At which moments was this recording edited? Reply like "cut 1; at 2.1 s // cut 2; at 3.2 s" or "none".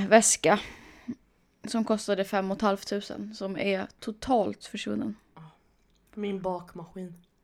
cut 1; at 4.6 s